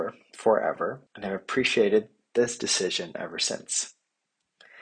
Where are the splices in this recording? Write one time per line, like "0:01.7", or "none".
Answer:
0:01.1